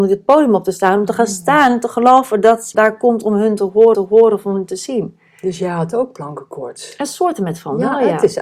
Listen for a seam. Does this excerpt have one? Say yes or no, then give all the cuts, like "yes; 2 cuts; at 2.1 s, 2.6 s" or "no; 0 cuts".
yes; 2 cuts; at 2.7 s, 3.9 s